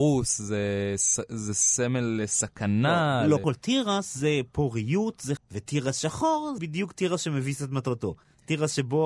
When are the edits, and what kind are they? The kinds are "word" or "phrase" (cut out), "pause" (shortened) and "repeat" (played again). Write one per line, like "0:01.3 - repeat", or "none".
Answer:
0:03.4 - word
0:05.4 - word
0:06.6 - word